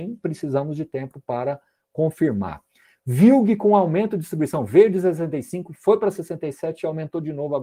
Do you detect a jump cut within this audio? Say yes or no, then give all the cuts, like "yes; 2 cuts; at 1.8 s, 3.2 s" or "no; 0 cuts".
no; 0 cuts